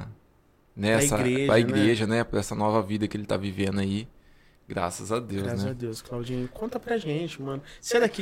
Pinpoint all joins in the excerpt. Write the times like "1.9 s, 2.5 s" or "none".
none

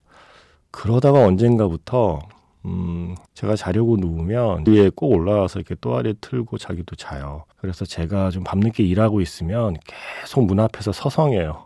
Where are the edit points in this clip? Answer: 3.3 s, 4.7 s, 7.5 s

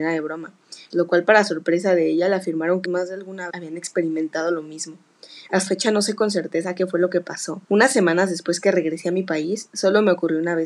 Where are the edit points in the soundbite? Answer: 0.9 s, 2.9 s, 3.5 s, 5.7 s, 7.6 s

